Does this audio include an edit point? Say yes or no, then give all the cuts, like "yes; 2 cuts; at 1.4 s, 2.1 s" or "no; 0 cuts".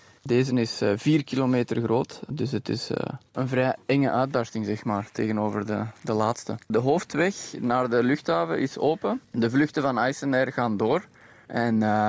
yes; 3 cuts; at 3.3 s, 6.6 s, 9.2 s